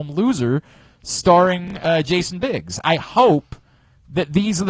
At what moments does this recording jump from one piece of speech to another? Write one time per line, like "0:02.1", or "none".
none